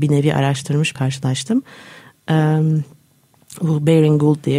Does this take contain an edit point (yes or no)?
yes